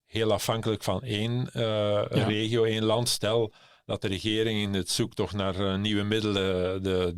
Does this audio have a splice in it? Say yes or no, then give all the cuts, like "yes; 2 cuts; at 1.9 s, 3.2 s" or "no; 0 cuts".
no; 0 cuts